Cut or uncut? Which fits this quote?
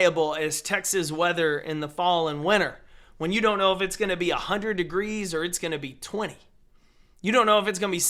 uncut